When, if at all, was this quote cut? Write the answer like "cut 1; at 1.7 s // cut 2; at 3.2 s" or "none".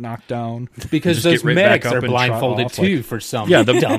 none